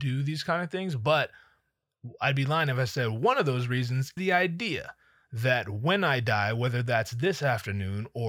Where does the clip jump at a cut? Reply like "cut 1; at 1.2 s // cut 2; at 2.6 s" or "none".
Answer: cut 1; at 4.2 s

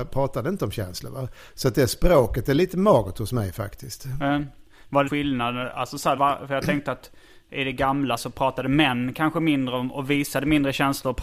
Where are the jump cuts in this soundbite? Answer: cut 1; at 5.1 s // cut 2; at 6.2 s // cut 3; at 8.2 s

